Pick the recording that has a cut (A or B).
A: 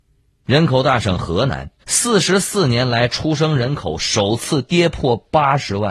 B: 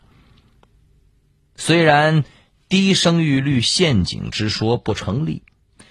A